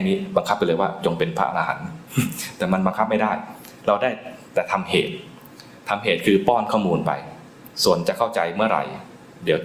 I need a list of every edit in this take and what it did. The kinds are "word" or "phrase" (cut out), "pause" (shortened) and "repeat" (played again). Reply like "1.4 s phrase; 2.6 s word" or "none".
7.7 s pause